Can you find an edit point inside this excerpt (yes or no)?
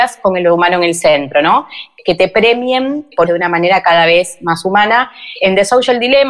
yes